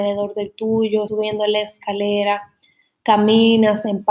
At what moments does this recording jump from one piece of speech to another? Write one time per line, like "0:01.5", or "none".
0:01.1